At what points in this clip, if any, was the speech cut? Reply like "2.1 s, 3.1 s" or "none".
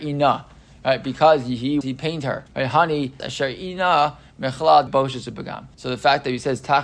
1.8 s, 2.5 s, 3.2 s, 4.9 s, 5.7 s